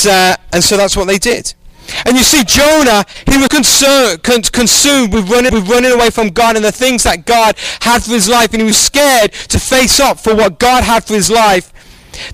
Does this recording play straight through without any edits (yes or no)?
no